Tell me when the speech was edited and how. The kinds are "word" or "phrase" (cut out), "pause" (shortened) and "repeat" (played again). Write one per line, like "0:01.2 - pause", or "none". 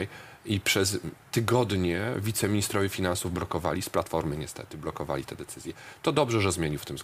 none